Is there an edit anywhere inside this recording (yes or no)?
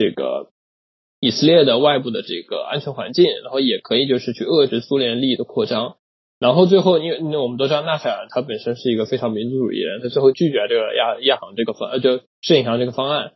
no